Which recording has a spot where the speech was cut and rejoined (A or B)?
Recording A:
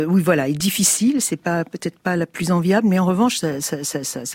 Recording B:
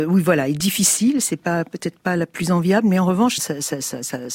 B